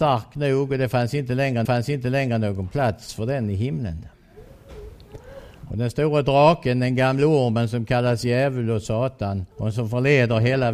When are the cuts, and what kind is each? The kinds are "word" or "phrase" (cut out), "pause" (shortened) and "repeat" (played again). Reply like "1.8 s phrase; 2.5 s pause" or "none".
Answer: 1.6 s repeat; 9.5 s pause